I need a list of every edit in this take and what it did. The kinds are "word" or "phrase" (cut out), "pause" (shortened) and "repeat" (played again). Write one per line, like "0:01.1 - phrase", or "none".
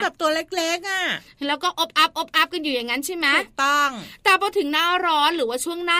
none